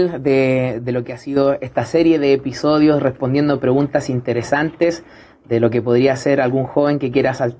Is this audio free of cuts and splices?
yes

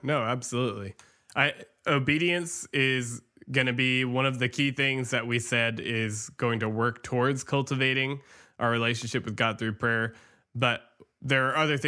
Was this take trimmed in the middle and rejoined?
no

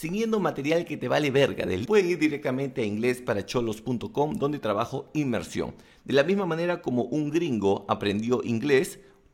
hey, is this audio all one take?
no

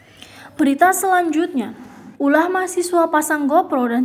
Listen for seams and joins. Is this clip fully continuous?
no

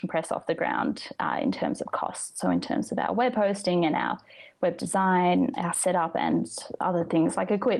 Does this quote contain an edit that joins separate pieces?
yes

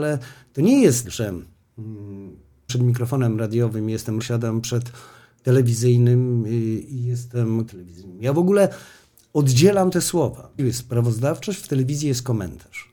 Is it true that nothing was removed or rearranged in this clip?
no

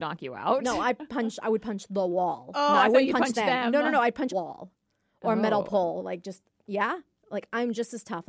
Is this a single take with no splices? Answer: no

